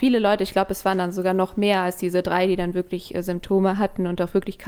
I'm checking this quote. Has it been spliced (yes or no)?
no